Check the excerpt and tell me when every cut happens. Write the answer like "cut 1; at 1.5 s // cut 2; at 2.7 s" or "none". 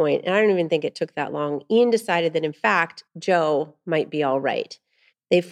cut 1; at 3.1 s